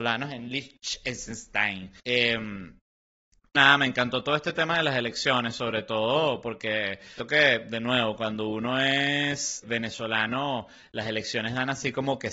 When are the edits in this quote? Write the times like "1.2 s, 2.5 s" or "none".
2.0 s, 3.5 s, 7.2 s, 9.6 s